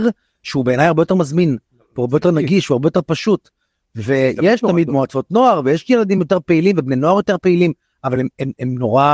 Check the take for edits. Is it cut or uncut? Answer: uncut